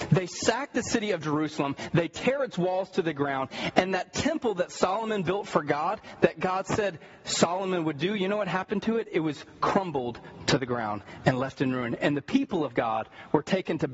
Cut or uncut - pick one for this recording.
uncut